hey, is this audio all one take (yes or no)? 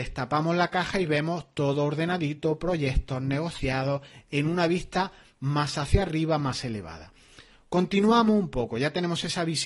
yes